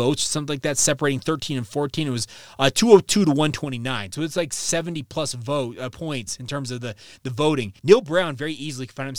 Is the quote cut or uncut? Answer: cut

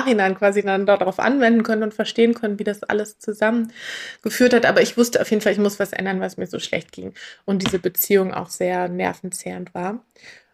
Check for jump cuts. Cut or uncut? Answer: uncut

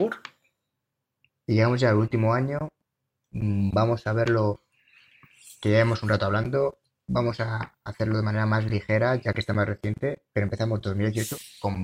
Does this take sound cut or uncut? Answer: uncut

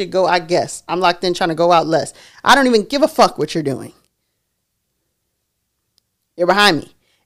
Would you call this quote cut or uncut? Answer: uncut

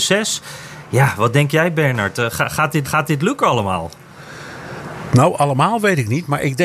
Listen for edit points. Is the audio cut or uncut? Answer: cut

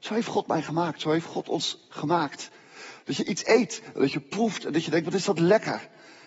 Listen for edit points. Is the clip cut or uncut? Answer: uncut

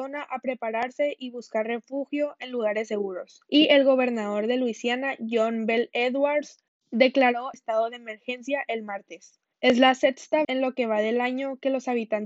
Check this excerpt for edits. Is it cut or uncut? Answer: cut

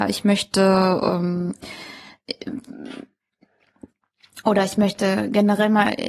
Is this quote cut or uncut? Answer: uncut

